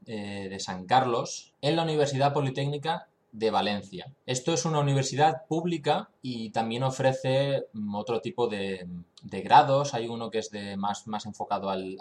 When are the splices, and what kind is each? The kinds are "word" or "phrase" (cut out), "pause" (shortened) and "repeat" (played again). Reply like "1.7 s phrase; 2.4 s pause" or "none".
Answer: 4.2 s pause; 6.2 s pause; 9.1 s pause